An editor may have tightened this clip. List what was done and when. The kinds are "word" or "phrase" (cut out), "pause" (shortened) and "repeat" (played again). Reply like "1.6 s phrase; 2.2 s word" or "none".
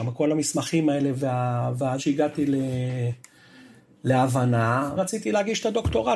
2.0 s word; 5.0 s word